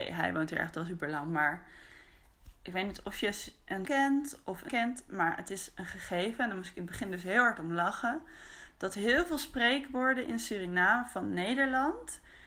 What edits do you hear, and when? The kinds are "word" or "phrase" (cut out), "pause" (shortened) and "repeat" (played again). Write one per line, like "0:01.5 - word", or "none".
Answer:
0:03.8 - word
0:04.7 - word